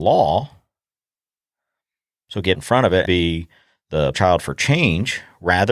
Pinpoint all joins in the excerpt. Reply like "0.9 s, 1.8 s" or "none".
2.5 s, 3.1 s, 4.1 s